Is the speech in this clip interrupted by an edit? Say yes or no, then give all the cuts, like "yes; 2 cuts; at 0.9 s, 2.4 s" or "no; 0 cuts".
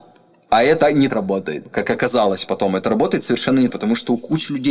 yes; 2 cuts; at 1.1 s, 3.7 s